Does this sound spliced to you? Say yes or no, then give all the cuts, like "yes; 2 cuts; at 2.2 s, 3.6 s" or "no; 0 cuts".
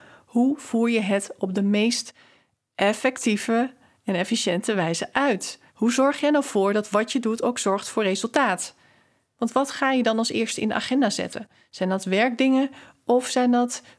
yes; 1 cut; at 5.7 s